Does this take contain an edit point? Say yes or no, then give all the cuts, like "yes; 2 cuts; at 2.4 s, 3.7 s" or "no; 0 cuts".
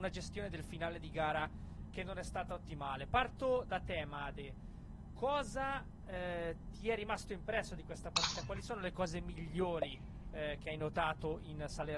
no; 0 cuts